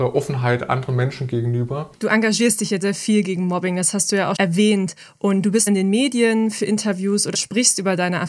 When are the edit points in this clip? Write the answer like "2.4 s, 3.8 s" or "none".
1.9 s, 2.8 s, 4.4 s, 5.7 s, 7.3 s